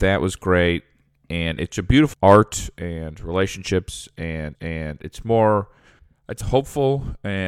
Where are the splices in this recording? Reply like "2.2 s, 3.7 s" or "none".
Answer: 1.7 s, 2.1 s, 4.5 s, 6.0 s, 6.4 s